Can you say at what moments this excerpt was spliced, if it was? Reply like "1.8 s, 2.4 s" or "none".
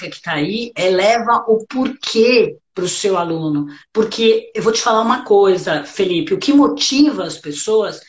2.6 s